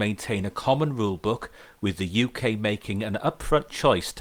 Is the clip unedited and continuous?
yes; 0 cuts

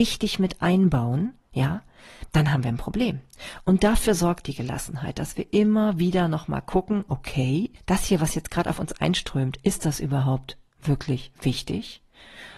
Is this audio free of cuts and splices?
no; 1 cut; at 7.8 s

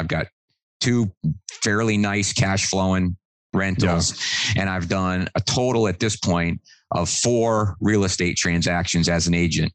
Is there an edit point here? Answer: no; 0 cuts

